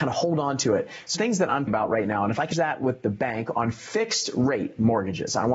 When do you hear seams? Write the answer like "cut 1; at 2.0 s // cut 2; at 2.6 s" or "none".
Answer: cut 1; at 1.2 s // cut 2; at 1.7 s // cut 3; at 2.5 s